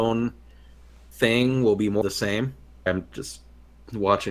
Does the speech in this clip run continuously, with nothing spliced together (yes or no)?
no